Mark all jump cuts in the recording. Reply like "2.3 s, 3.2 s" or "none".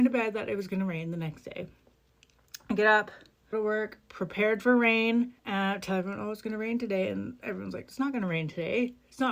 3.5 s, 5.4 s